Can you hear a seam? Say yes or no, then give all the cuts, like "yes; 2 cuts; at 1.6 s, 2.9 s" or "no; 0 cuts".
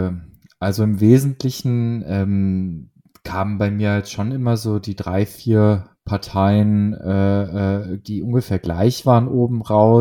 no; 0 cuts